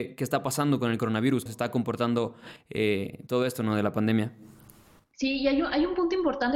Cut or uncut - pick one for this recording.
cut